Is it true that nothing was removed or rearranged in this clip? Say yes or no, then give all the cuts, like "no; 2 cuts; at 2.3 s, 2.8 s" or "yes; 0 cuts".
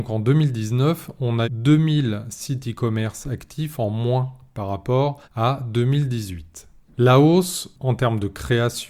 no; 3 cuts; at 1.4 s, 5.2 s, 6.9 s